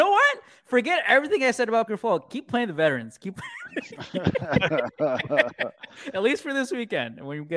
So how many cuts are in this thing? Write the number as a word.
one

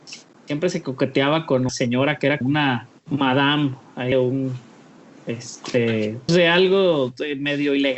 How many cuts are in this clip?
four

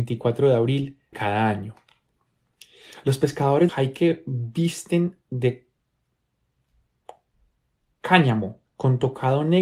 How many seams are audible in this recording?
three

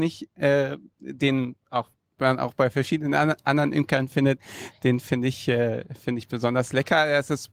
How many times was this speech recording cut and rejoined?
zero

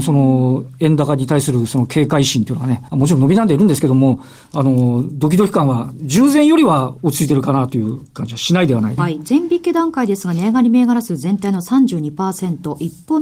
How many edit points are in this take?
two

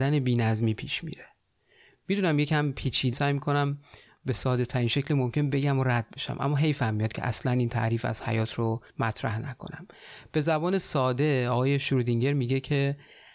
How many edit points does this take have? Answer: two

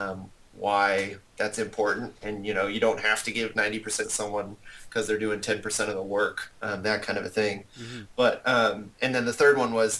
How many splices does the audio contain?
one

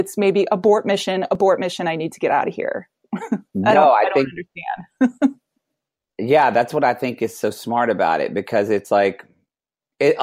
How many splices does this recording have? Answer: zero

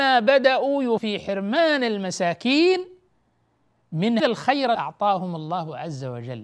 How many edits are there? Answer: three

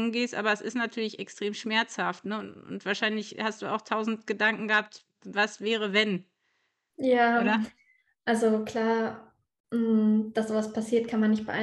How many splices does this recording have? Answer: zero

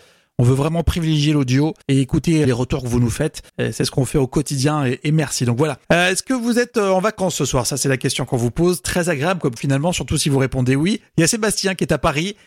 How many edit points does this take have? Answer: six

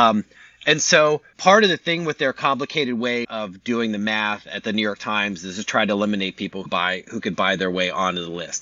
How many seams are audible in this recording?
three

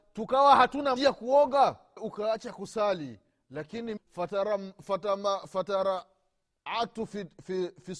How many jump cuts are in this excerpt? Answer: three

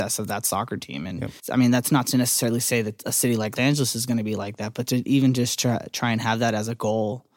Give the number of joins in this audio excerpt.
two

